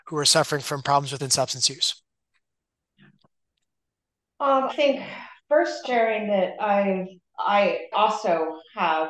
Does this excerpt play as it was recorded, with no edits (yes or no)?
no